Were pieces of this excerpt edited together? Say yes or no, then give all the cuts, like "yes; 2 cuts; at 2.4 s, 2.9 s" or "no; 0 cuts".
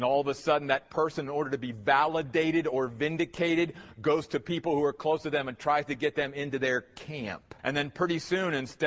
yes; 1 cut; at 7.6 s